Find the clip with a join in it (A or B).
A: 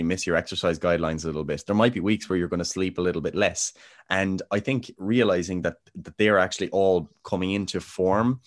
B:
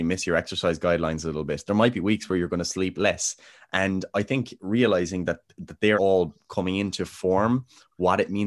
B